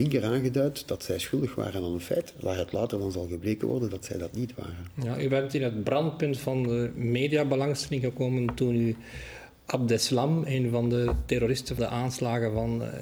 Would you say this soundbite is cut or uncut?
cut